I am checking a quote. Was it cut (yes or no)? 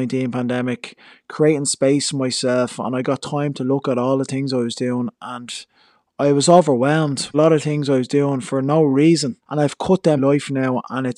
yes